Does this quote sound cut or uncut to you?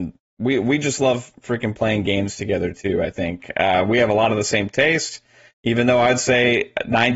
uncut